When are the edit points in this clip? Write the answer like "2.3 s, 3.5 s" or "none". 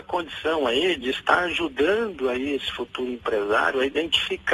none